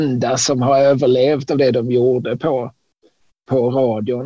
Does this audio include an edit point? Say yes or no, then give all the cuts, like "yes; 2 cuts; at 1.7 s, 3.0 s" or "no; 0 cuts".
no; 0 cuts